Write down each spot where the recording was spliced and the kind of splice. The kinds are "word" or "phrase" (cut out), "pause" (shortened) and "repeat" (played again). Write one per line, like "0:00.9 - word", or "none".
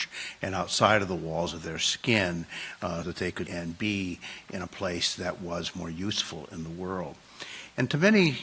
0:03.0 - word
0:03.5 - word